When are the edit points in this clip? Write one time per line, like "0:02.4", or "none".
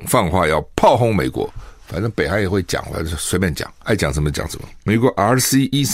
0:04.8